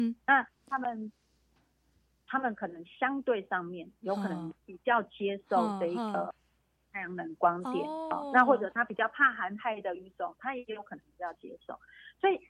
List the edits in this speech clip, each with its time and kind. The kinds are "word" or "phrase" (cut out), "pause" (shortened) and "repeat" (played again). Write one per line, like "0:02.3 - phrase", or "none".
0:04.6 - pause